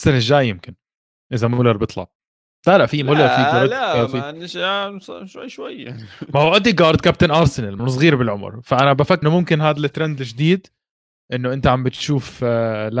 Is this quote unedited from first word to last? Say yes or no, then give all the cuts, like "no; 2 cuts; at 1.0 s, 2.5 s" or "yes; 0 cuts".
no; 2 cuts; at 7.8 s, 9.2 s